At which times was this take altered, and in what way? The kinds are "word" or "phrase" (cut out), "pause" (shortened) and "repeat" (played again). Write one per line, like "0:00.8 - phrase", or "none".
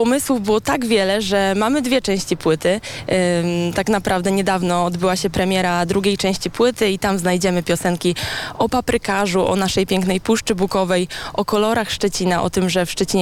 none